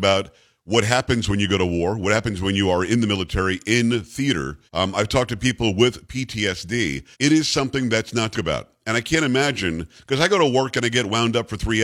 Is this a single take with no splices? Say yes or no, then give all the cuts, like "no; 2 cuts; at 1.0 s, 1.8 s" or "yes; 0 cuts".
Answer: no; 3 cuts; at 4.7 s, 7.1 s, 8.3 s